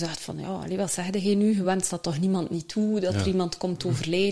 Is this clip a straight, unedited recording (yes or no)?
yes